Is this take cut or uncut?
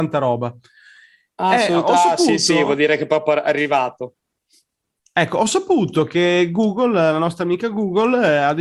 uncut